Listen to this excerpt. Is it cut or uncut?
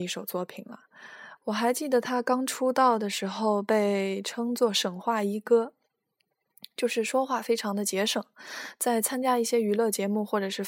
uncut